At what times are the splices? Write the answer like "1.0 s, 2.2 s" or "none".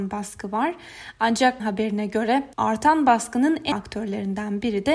1.6 s, 2.5 s, 3.7 s